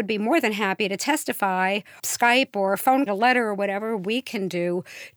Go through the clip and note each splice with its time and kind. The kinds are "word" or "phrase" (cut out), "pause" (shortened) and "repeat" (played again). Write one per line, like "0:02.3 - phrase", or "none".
0:02.0 - word
0:03.1 - phrase